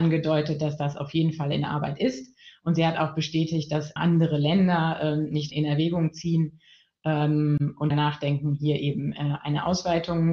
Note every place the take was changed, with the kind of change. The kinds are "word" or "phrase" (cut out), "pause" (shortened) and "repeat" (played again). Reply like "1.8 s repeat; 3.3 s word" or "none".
4.0 s word; 5.5 s word; 7.9 s word